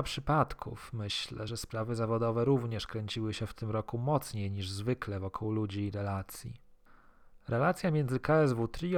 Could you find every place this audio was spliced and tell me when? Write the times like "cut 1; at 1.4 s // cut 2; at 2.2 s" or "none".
none